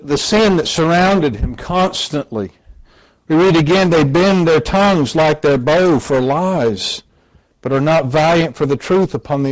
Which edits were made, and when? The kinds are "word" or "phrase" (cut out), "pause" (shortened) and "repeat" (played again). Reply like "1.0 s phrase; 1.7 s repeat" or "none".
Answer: none